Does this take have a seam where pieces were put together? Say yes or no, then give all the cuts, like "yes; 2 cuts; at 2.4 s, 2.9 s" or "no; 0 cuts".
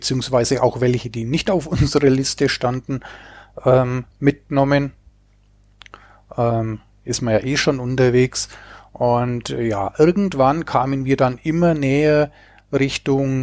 no; 0 cuts